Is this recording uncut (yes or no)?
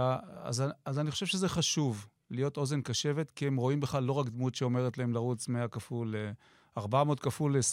yes